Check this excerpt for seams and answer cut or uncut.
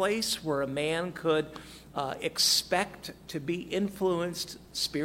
uncut